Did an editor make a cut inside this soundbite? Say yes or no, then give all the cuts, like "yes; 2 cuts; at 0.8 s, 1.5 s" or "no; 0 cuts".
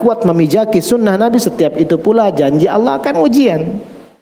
yes; 1 cut; at 3.1 s